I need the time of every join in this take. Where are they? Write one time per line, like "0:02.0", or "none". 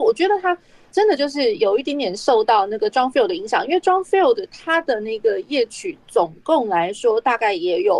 0:00.9